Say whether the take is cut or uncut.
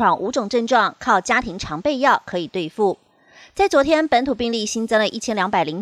uncut